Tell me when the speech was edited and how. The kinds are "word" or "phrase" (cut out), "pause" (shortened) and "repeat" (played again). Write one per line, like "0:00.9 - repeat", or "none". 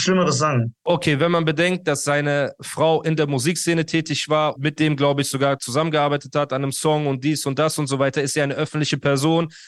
0:04.6 - word